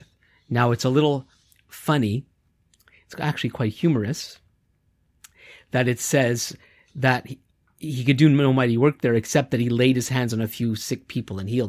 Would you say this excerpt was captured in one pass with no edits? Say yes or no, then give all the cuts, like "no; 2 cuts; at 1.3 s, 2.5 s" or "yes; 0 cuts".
yes; 0 cuts